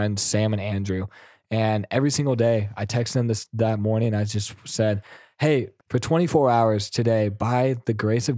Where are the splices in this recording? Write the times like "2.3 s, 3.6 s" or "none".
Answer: 5.8 s